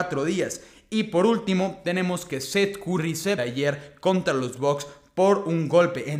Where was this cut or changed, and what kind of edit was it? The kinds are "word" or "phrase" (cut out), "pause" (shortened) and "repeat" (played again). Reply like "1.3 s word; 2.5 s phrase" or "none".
3.4 s phrase